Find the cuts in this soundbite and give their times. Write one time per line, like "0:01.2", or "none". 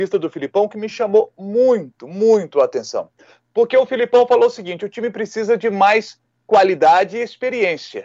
none